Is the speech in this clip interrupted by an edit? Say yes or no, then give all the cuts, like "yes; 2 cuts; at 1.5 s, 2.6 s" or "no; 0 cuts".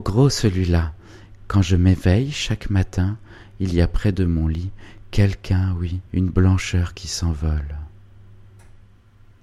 yes; 1 cut; at 6.1 s